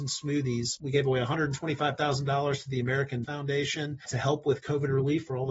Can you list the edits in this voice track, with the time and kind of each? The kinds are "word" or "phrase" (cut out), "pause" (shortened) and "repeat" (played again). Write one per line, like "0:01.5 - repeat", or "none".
0:03.2 - word